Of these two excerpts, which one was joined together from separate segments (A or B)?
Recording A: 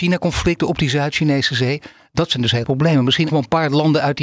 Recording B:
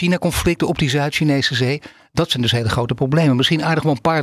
A